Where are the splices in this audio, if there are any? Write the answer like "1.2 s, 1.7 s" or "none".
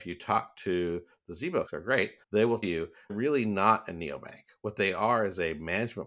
1.7 s, 2.2 s, 2.6 s, 3.1 s